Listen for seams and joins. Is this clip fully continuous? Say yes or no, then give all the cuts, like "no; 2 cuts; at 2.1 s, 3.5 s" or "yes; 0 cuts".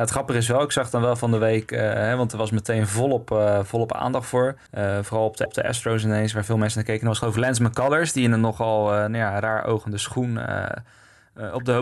no; 2 cuts; at 4.7 s, 5.5 s